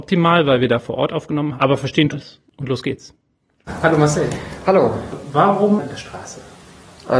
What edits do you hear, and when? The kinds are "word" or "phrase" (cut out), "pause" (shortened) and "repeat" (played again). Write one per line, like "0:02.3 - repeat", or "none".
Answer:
0:01.6 - word
0:02.1 - phrase
0:02.5 - pause
0:05.9 - phrase